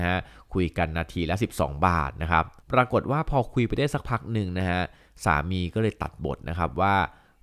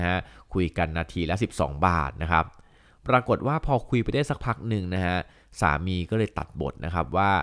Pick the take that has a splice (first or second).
first